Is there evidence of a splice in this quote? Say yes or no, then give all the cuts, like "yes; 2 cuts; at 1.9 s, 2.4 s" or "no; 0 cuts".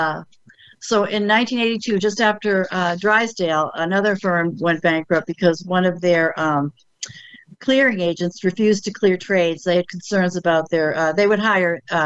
no; 0 cuts